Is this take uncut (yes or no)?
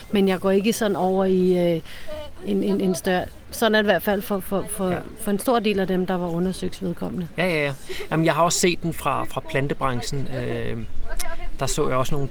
yes